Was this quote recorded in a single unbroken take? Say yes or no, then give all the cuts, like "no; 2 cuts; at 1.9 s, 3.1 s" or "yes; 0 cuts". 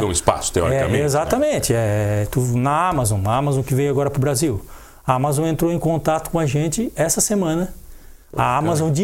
yes; 0 cuts